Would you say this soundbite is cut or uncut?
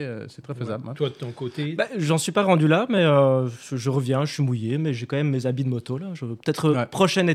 uncut